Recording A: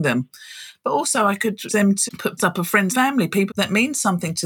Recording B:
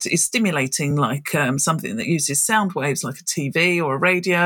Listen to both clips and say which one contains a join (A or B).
A